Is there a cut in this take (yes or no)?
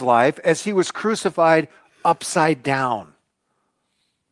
no